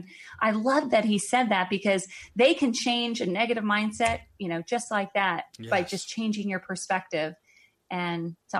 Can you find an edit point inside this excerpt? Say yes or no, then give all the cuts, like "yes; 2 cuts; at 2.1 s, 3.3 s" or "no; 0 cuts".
yes; 1 cut; at 5.5 s